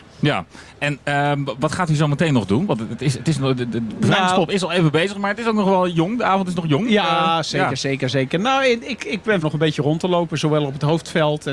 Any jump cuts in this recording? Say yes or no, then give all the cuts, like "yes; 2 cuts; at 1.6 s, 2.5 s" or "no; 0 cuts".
yes; 1 cut; at 9.4 s